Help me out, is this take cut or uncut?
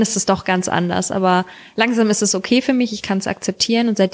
uncut